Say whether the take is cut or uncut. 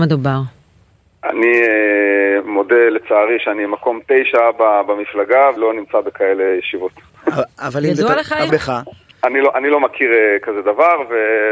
cut